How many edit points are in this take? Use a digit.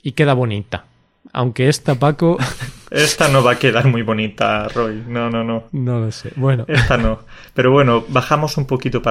1